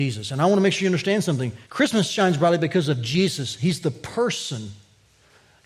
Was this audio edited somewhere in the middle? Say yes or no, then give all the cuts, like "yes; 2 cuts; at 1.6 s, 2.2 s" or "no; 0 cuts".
yes; 1 cut; at 1.6 s